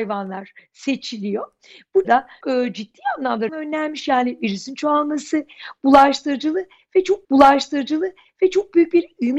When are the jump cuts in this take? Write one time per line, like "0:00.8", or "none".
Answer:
0:02.0
0:02.4
0:03.5
0:07.2